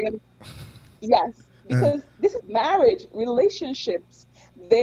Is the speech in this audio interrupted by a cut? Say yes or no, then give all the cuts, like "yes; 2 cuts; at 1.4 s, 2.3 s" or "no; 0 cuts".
yes; 1 cut; at 2.4 s